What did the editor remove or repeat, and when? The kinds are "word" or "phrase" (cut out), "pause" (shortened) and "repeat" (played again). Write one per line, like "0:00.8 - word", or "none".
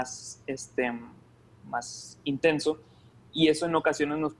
0:01.5 - word